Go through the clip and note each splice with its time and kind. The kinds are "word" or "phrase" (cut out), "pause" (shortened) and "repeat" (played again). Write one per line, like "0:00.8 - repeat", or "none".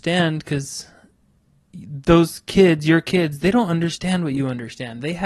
none